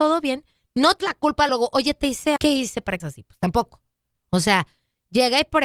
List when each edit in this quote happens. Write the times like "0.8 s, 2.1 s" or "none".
1.0 s, 1.5 s, 2.4 s, 3.0 s